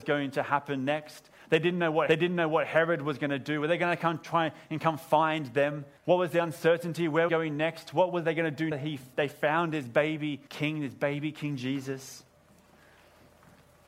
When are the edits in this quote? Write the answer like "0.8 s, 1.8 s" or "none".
2.1 s, 6.0 s, 7.3 s, 8.7 s, 10.5 s